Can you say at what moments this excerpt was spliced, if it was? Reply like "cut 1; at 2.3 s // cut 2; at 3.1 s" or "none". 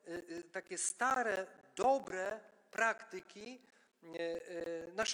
none